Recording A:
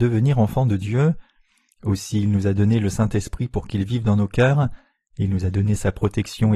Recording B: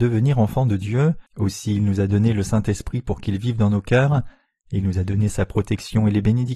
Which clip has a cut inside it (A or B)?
B